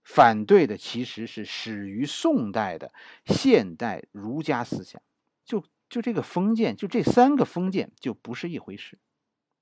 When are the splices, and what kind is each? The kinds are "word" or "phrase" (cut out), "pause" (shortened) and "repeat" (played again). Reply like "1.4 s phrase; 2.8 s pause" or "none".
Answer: 5.4 s phrase